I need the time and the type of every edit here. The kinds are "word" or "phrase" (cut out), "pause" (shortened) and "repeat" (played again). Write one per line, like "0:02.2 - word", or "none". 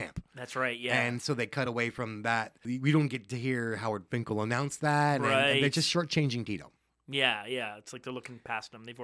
none